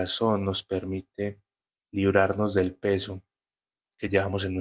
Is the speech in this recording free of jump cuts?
no; 1 cut; at 1.7 s

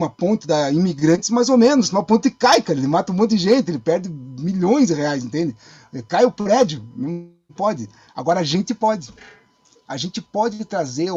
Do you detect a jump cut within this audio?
no; 0 cuts

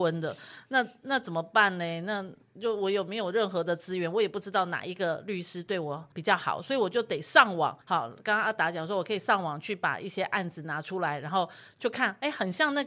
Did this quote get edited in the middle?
yes; 2 cuts; at 6.1 s, 7.8 s

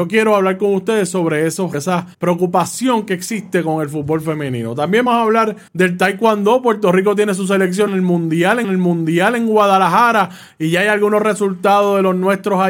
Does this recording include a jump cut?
yes; 6 cuts; at 1.7 s, 2.1 s, 5.1 s, 5.7 s, 7.9 s, 8.6 s

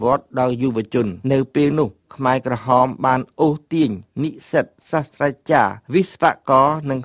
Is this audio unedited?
no; 2 cuts; at 1.2 s, 5.8 s

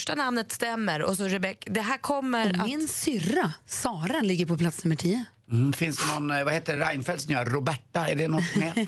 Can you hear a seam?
no; 0 cuts

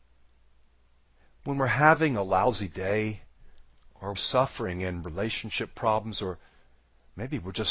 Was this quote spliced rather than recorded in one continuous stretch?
yes; 1 cut; at 4.1 s

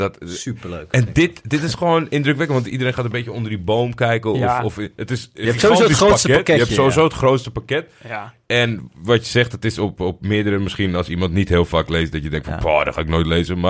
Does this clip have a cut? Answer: no; 0 cuts

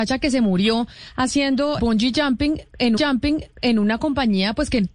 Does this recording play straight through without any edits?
no; 2 cuts; at 1.8 s, 3.0 s

